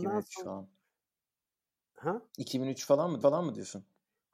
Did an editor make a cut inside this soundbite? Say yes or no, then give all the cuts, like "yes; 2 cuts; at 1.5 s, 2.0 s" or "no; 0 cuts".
yes; 2 cuts; at 2.3 s, 3.2 s